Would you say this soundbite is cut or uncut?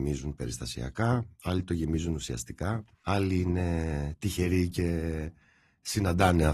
uncut